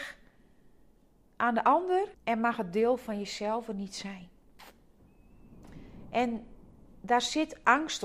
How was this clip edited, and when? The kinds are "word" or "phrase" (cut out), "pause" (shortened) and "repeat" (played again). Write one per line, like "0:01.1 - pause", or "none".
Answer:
0:02.1 - pause